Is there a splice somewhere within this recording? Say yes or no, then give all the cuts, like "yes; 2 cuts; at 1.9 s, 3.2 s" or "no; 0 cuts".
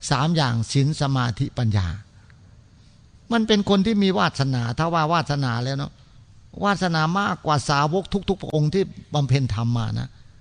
no; 0 cuts